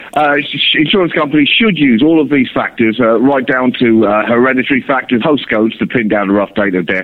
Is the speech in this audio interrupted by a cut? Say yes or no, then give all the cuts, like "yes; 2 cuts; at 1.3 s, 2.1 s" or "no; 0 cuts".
yes; 1 cut; at 5.2 s